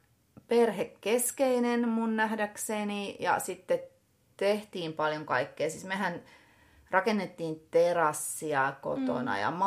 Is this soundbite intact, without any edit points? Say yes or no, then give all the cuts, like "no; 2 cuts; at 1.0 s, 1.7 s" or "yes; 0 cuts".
yes; 0 cuts